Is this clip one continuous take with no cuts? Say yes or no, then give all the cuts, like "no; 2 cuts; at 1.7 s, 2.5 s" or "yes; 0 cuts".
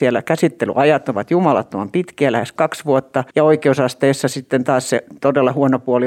no; 1 cut; at 3.3 s